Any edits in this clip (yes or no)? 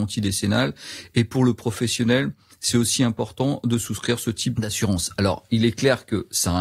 no